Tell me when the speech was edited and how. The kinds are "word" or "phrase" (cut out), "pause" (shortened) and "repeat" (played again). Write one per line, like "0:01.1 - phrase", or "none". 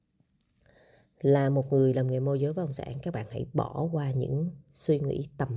none